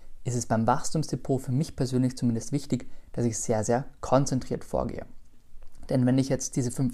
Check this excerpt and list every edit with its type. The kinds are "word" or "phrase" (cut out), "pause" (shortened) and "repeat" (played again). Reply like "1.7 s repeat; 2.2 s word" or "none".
none